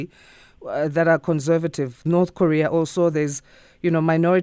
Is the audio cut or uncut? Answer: uncut